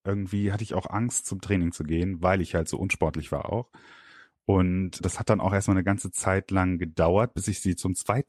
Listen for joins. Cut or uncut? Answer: uncut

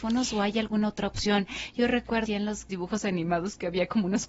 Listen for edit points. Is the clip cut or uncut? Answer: cut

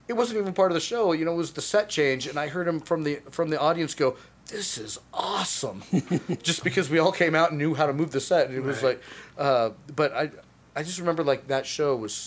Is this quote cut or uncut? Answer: uncut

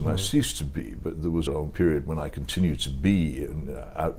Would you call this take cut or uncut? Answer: cut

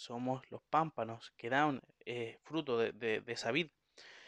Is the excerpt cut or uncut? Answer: uncut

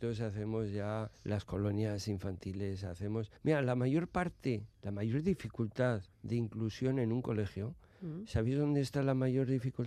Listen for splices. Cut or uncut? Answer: cut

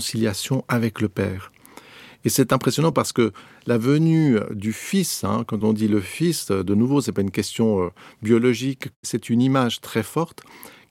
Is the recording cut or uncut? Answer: uncut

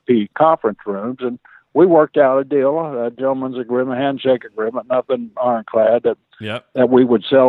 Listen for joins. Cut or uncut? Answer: uncut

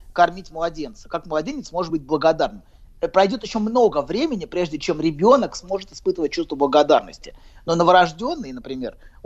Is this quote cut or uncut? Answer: uncut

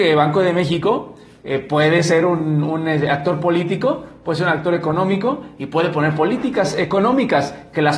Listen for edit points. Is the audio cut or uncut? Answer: uncut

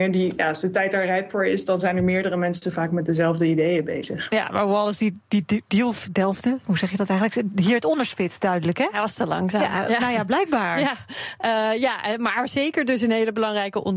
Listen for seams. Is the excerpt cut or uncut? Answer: uncut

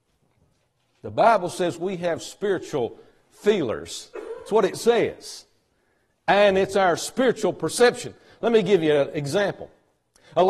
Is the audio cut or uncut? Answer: uncut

